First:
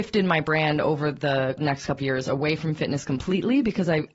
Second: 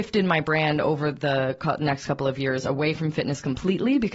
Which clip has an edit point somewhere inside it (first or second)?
first